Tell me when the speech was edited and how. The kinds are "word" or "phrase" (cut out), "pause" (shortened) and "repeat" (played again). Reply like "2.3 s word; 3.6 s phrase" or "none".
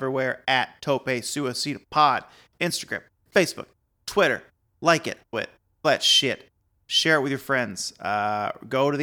5.3 s word; 5.8 s word